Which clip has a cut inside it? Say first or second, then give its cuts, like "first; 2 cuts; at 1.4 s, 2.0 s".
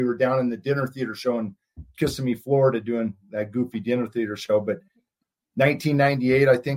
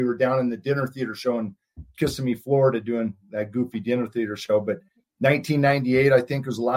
second; 1 cut; at 5.0 s